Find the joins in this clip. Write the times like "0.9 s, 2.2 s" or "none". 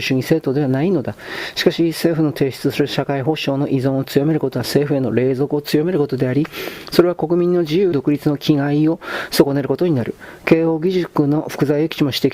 7.9 s